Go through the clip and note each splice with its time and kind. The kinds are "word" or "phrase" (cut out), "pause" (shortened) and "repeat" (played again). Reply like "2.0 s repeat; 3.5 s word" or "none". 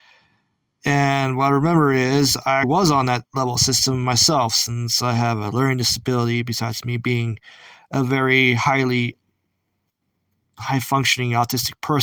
2.6 s word